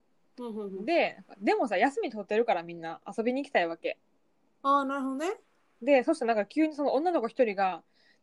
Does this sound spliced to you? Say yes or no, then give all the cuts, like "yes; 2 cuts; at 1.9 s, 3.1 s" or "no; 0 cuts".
no; 0 cuts